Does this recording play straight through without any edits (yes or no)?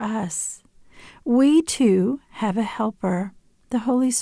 yes